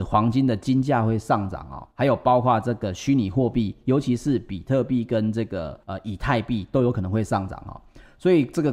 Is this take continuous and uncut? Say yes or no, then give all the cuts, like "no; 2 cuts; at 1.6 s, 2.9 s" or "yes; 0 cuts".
no; 2 cuts; at 1.9 s, 5.8 s